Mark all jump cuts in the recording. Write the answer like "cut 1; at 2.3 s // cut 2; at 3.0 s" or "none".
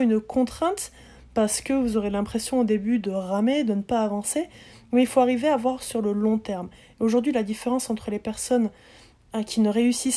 none